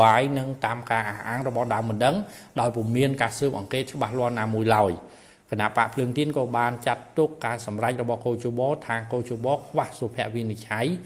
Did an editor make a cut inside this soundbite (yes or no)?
no